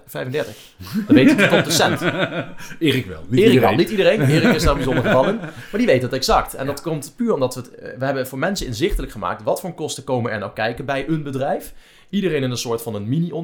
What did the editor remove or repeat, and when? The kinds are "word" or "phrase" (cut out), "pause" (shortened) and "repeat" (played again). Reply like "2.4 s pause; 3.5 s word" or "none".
none